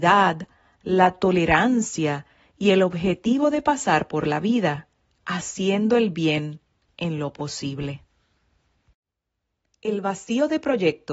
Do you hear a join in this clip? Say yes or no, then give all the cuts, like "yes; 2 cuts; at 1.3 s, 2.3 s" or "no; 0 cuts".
no; 0 cuts